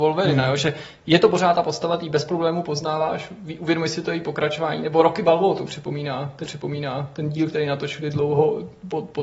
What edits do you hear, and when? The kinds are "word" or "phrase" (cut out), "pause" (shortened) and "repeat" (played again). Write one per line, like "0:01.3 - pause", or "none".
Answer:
0:06.4 - repeat